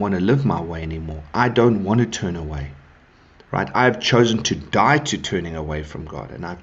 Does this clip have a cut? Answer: no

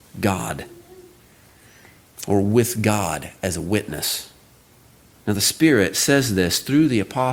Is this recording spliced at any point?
no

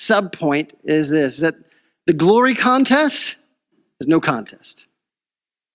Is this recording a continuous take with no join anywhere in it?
yes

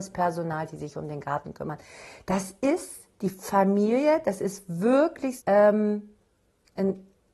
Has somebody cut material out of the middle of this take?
yes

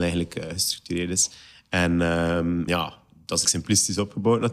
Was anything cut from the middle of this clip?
yes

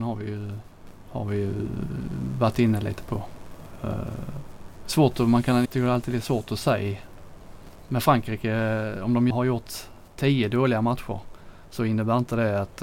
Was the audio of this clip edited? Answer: yes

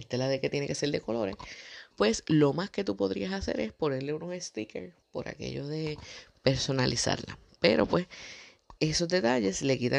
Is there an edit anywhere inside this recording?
yes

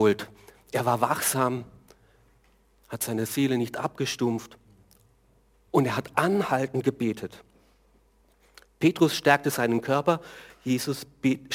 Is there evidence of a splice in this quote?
no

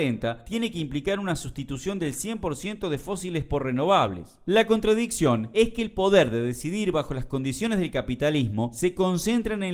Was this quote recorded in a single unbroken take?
yes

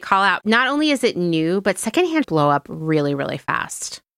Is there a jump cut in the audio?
yes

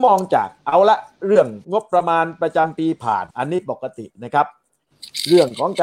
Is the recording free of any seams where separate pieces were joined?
no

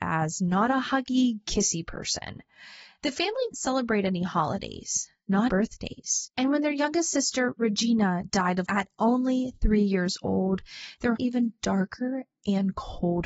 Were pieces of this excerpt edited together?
yes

